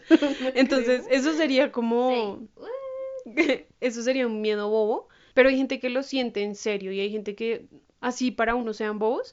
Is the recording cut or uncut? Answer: uncut